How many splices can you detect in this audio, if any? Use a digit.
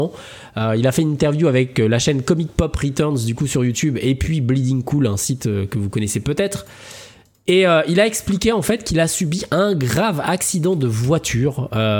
0